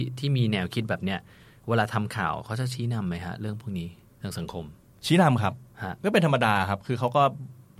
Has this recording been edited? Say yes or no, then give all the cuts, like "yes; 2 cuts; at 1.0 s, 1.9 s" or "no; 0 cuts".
no; 0 cuts